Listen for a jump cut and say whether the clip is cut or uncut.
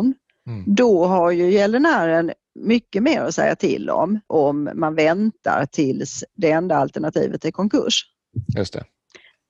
cut